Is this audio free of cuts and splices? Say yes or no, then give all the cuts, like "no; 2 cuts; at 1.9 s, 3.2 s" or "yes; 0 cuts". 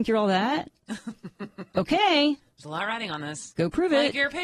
yes; 0 cuts